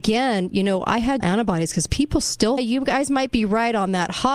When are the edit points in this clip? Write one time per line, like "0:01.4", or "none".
0:01.2
0:02.6